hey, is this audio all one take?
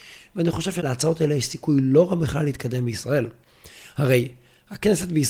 yes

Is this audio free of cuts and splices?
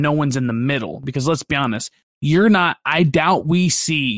yes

